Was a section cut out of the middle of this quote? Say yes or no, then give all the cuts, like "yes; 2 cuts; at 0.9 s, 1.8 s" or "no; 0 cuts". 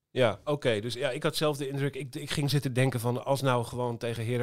no; 0 cuts